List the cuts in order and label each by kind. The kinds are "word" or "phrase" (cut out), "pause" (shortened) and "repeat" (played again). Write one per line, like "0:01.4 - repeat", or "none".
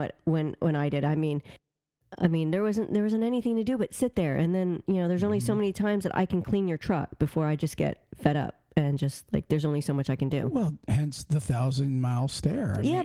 none

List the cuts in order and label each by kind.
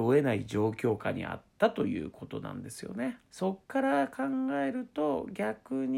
0:03.6 - pause

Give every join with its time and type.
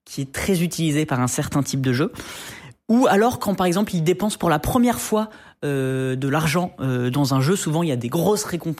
none

